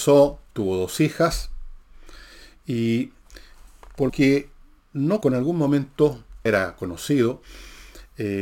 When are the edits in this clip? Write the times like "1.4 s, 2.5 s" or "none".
4.1 s, 5.2 s, 6.5 s